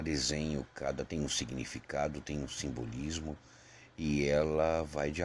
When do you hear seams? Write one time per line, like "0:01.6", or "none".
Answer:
0:01.1